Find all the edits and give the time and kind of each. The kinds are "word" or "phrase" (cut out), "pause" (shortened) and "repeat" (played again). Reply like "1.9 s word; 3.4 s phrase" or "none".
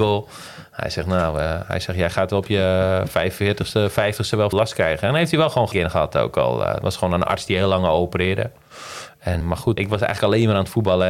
4.5 s word; 5.7 s word; 9.4 s word; 9.8 s word